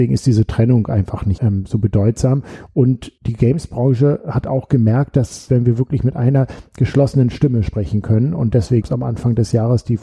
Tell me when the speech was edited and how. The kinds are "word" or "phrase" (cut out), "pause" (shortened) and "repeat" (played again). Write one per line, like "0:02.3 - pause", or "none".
0:01.4 - word
0:03.2 - pause
0:05.5 - phrase
0:08.8 - word